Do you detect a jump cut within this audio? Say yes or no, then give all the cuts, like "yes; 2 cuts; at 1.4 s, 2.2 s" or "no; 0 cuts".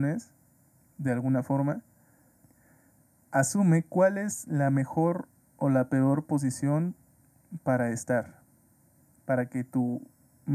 no; 0 cuts